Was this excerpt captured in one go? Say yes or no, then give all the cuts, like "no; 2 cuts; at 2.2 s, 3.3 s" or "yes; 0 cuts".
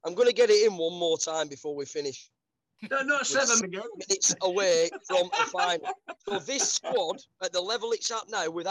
no; 2 cuts; at 3.6 s, 6.2 s